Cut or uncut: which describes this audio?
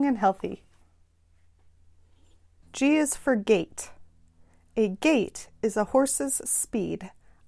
uncut